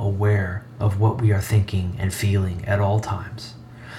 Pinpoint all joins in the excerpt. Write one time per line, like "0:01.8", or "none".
none